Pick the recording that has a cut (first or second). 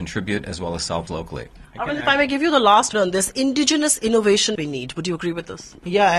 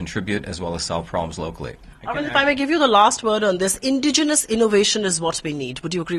first